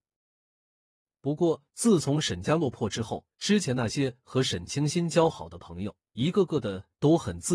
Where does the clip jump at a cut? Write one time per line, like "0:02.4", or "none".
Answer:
0:03.3
0:06.1